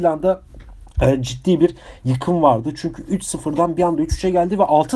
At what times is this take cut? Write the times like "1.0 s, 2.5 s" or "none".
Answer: none